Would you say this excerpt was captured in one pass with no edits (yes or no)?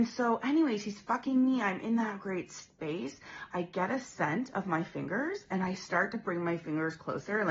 yes